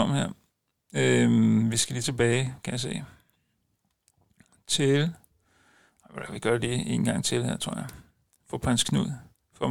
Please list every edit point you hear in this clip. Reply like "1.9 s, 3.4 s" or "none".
none